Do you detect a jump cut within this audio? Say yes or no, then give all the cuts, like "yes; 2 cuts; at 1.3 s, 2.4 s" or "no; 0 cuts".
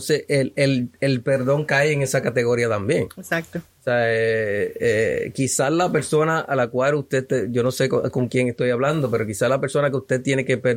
no; 0 cuts